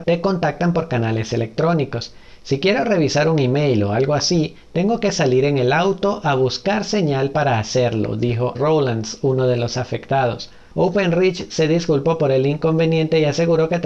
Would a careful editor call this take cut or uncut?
cut